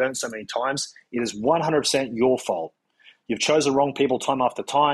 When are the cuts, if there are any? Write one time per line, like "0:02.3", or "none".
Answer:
none